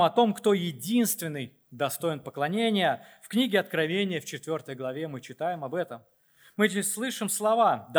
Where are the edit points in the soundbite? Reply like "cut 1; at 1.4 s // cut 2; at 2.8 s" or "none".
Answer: none